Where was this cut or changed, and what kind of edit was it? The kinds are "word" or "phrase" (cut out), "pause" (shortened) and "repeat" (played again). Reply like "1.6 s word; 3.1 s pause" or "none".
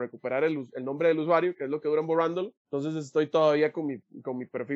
2.6 s pause

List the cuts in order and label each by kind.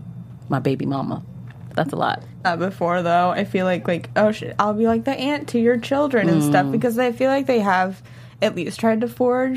1.7 s word; 2.4 s phrase

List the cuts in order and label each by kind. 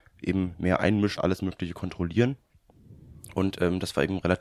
1.2 s word

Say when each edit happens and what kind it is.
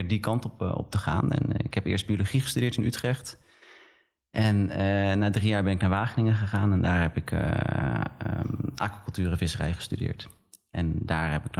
none

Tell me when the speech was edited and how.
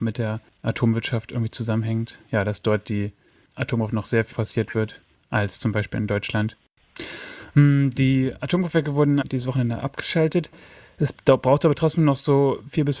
4.3 s word; 9.2 s word

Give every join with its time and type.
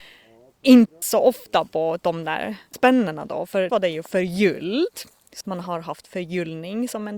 1.0 s word; 2.7 s word; 3.7 s word; 5.4 s word

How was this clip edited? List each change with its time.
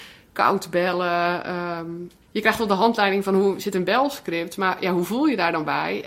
2.2 s pause

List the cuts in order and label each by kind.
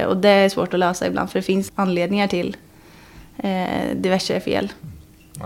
1.7 s phrase

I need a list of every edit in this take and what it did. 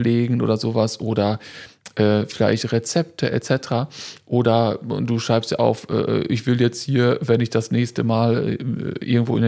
none

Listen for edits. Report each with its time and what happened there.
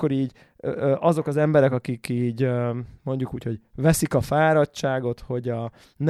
none

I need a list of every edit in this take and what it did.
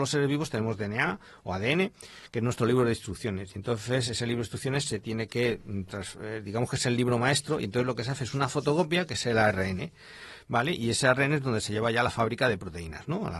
none

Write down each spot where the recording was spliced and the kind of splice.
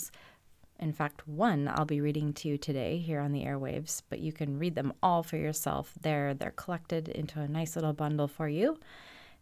none

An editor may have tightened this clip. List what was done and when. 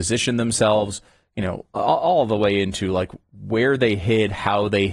none

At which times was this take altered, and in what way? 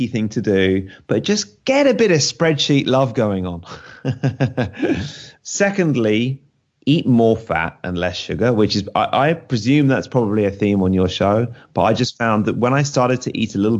none

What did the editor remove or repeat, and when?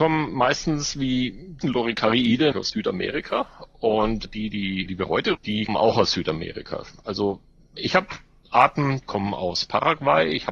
1.6 s word; 2.5 s word; 4.2 s word; 4.9 s word; 5.3 s word; 5.7 s word; 9.0 s word

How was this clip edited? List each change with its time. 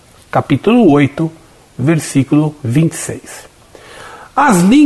2.6 s pause

